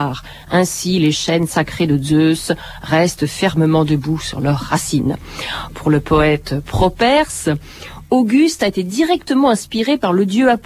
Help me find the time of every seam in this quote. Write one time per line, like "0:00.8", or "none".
none